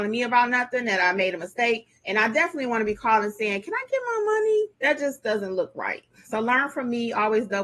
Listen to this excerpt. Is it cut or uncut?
cut